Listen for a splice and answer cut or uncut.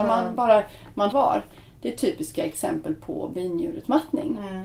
cut